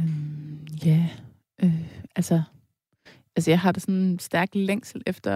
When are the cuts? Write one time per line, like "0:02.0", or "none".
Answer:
none